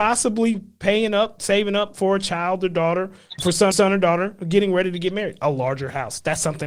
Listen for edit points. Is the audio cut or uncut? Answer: cut